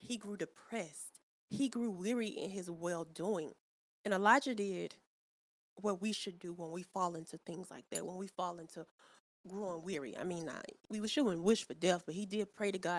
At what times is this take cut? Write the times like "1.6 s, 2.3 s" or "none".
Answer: none